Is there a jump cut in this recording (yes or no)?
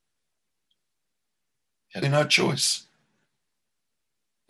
yes